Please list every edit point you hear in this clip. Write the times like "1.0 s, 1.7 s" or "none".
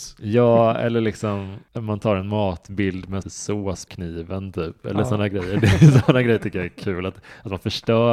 1.7 s, 3.2 s, 3.9 s

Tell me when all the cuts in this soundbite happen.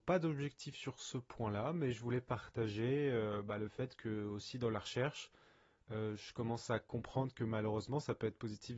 none

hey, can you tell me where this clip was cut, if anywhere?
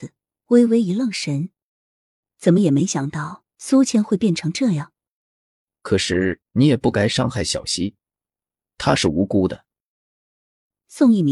none

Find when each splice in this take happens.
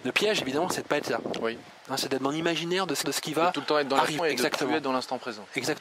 3.0 s, 4.2 s

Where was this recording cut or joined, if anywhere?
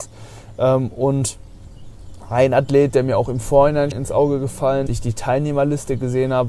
3.9 s, 4.9 s

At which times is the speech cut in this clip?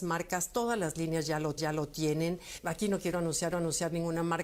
1.6 s, 3.5 s

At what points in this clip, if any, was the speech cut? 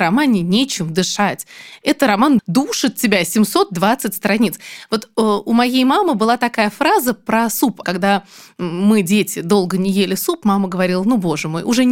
2.4 s, 7.8 s

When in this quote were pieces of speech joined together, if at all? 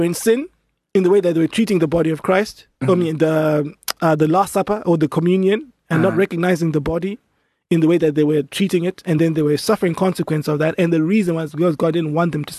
none

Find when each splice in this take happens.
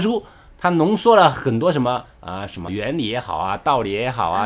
2.7 s

